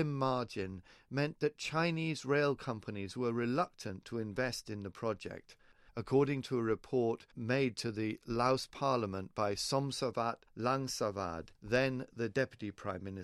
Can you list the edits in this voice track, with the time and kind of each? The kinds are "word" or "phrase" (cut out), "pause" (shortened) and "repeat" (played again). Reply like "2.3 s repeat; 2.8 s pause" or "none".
11.5 s pause